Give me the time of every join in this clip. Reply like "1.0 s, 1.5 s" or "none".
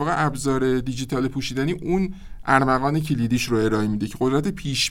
none